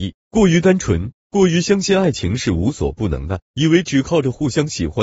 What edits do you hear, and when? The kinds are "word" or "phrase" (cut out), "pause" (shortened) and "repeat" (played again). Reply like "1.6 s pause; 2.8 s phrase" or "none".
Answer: 3.4 s pause

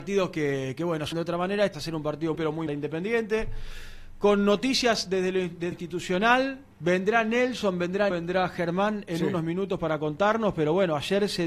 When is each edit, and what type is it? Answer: 1.1 s word; 1.7 s word; 2.3 s word; 2.7 s phrase; 5.7 s word; 6.7 s pause; 8.1 s word

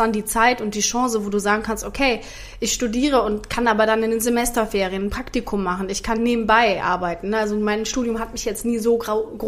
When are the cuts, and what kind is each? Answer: none

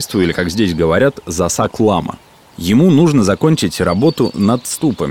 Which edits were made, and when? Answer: none

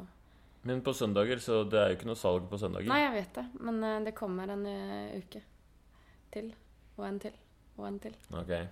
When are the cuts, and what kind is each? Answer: none

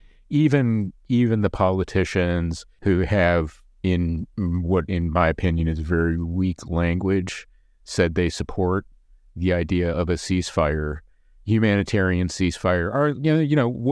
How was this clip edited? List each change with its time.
none

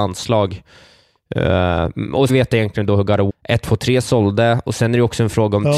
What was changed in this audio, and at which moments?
2.3 s phrase; 3.3 s word

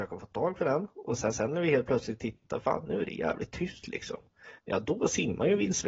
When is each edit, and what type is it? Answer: 1.3 s repeat; 4.6 s pause

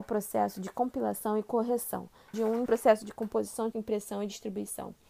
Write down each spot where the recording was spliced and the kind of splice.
2.3 s word; 2.7 s word; 3.7 s word

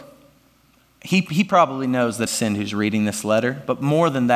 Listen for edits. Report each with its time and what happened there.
2.3 s phrase

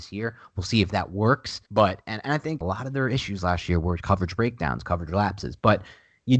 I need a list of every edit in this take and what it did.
1.7 s pause; 2.6 s phrase

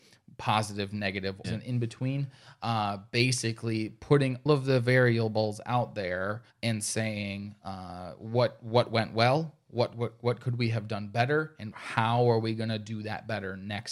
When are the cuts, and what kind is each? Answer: 1.4 s phrase; 4.5 s word; 6.5 s pause; 11.7 s word

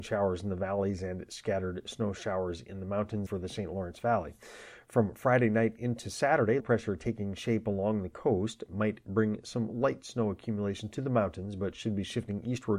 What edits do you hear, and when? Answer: 3.3 s phrase; 6.6 s word

